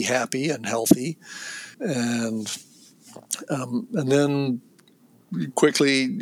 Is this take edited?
yes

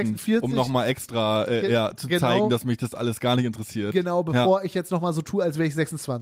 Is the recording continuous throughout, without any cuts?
yes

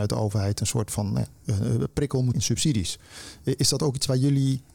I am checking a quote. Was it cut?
yes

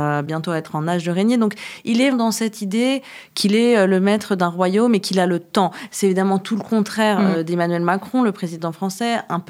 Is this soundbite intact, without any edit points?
no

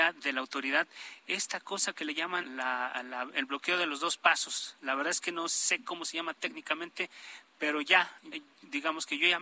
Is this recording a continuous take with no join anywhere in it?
no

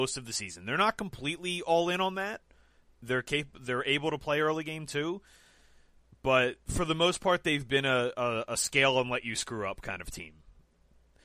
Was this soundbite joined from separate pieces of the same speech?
no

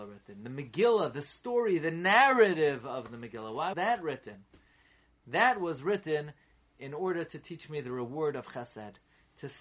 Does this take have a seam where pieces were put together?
yes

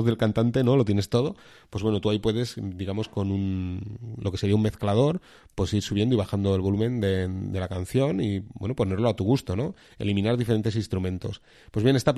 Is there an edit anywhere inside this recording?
no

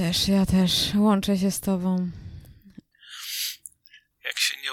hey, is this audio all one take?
yes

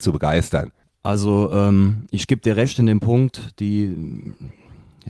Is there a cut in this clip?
no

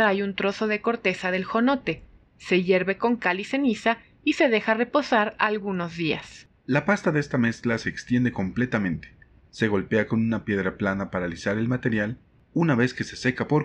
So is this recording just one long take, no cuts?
yes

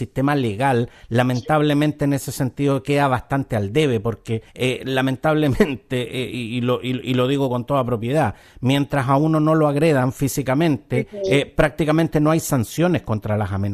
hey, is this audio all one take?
no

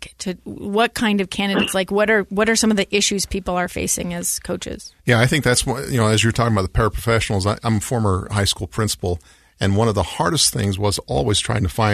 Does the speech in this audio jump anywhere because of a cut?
no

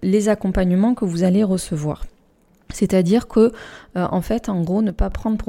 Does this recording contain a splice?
no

